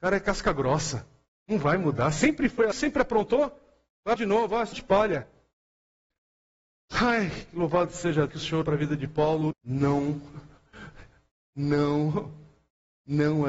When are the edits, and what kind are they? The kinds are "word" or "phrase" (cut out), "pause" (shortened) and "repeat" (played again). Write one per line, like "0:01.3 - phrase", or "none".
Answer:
0:02.7 - word
0:04.2 - word
0:04.7 - word
0:08.3 - word
0:08.6 - word
0:09.5 - word